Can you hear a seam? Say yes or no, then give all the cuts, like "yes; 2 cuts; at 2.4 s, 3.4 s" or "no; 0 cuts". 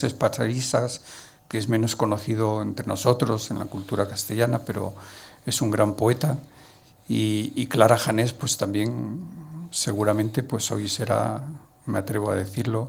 no; 0 cuts